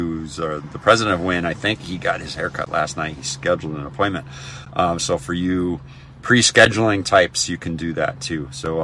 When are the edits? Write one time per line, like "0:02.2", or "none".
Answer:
none